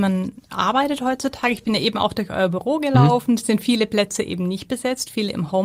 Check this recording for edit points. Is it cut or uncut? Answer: uncut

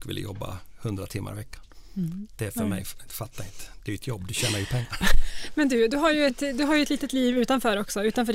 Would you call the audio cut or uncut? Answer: uncut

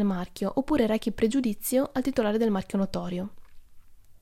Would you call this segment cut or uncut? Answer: uncut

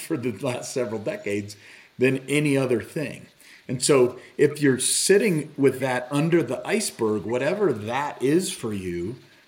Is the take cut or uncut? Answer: uncut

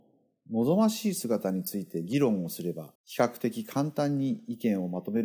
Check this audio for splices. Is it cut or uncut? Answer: cut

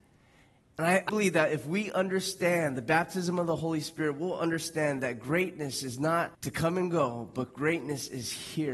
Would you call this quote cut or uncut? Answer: cut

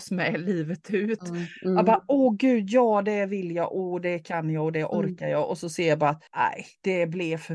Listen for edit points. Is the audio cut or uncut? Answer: cut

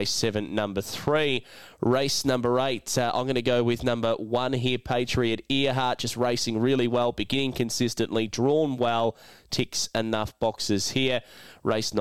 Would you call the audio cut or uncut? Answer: uncut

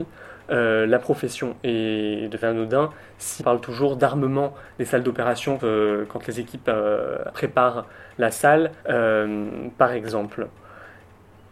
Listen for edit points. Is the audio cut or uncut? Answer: cut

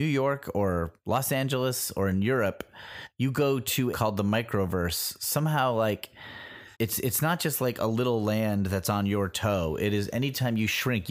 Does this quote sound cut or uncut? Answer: cut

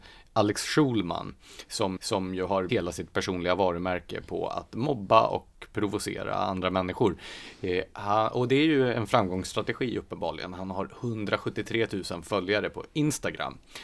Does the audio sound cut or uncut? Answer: cut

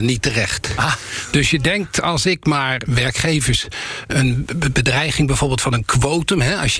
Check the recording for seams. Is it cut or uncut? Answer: uncut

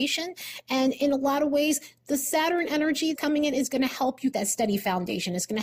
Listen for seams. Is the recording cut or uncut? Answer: cut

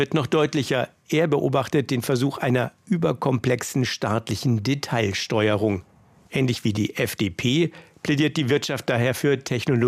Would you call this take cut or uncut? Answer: uncut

